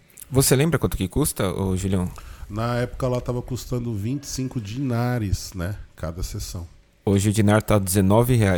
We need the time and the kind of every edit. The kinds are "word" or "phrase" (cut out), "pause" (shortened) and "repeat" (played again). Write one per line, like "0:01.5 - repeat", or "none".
none